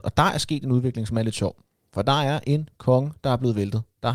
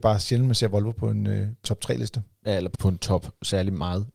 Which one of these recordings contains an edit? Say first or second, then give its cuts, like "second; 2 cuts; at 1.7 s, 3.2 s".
second; 2 cuts; at 1.6 s, 2.7 s